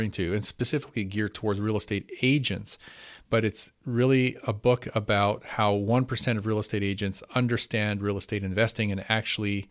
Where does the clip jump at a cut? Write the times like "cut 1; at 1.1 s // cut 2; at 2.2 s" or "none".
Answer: none